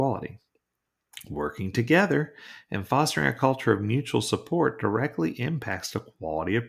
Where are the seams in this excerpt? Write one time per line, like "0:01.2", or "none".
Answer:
none